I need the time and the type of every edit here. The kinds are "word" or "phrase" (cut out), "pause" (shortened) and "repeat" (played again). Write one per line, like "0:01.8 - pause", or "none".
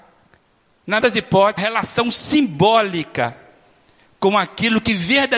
0:01.0 - word
0:01.6 - phrase